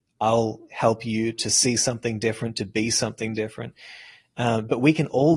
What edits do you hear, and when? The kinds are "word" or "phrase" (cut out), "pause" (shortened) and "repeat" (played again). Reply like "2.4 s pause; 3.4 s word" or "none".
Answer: none

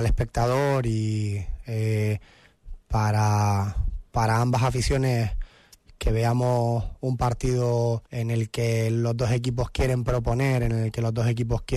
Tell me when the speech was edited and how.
2.8 s pause; 8.1 s pause

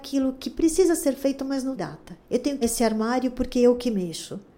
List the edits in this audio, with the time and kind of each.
1.8 s word; 2.2 s pause; 2.6 s word

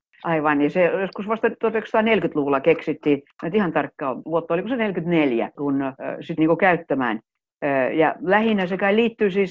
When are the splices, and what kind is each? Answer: 4.2 s word; 6.4 s word

